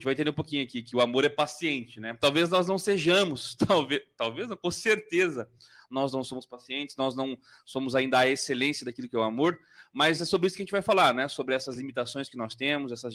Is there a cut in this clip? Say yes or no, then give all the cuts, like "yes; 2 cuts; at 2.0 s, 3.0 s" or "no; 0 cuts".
no; 0 cuts